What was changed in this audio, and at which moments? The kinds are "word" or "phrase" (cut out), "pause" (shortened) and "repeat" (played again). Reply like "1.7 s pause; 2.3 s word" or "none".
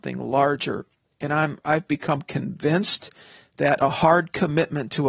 1.6 s word